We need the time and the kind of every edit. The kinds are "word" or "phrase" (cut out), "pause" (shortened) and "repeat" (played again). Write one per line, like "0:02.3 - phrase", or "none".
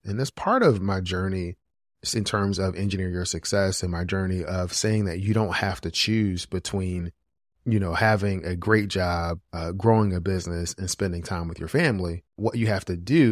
0:09.4 - pause
0:12.3 - pause

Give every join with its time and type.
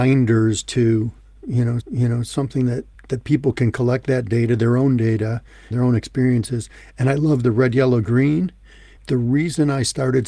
0:01.8 - repeat
0:02.9 - pause
0:05.7 - word
0:09.0 - word

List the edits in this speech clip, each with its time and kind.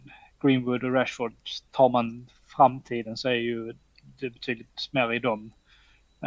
0:01.7 - pause
0:02.4 - pause

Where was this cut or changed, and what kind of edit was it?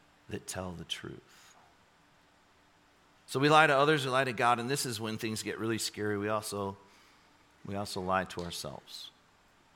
none

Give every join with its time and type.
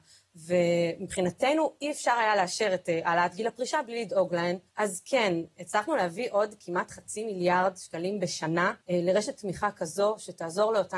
0:04.7 - pause
0:08.8 - pause

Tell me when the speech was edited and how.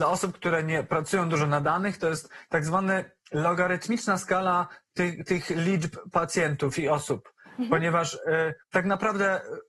0:08.6 - pause

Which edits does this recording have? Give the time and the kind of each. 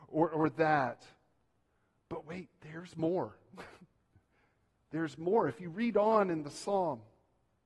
none

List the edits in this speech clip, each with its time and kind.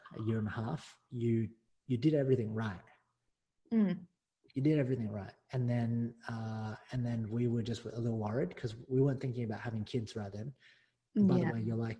none

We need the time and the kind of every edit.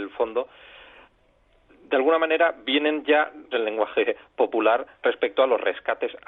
0:03.5 - phrase

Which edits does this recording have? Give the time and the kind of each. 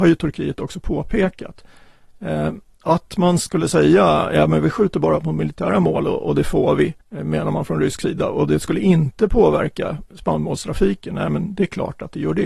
0:07.0 - pause

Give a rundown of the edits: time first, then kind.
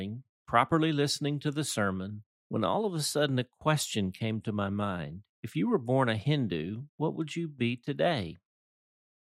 0:02.3 - pause
0:05.3 - pause
0:06.9 - pause

